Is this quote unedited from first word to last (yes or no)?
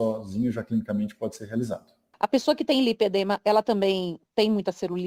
yes